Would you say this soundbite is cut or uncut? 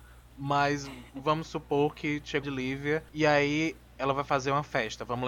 cut